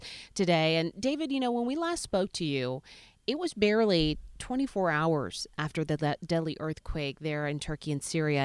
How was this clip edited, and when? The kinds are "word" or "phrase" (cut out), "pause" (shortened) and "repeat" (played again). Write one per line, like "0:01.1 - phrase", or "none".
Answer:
none